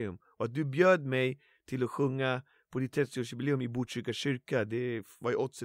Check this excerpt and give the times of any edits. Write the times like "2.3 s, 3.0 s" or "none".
none